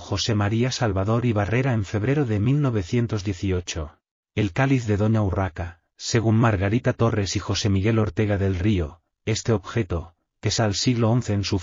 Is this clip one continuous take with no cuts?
no; 1 cut; at 10.6 s

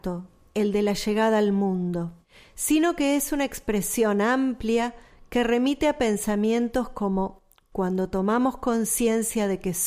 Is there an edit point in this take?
no; 0 cuts

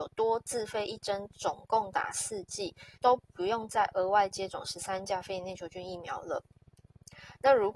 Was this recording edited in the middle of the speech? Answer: yes; 1 cut; at 2.9 s

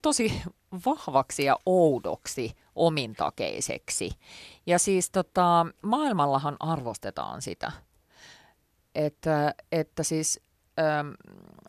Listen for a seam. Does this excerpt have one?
yes; 1 cut; at 5.8 s

